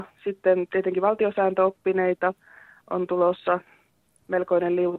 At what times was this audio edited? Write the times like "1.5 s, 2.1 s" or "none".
none